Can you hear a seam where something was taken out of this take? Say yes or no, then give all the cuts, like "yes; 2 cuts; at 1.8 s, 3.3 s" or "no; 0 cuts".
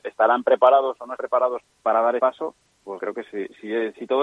yes; 4 cuts; at 1.2 s, 1.6 s, 2.2 s, 3.0 s